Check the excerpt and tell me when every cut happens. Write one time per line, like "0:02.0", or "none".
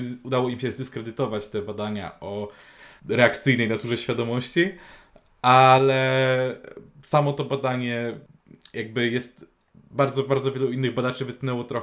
none